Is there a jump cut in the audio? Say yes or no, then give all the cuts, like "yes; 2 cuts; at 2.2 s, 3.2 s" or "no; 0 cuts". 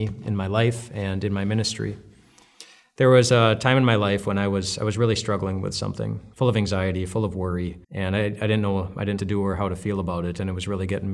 yes; 3 cuts; at 6.3 s, 7.8 s, 9.2 s